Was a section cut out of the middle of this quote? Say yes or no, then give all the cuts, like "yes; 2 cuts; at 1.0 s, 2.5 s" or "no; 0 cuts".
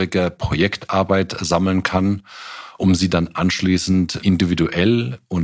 yes; 1 cut; at 4.2 s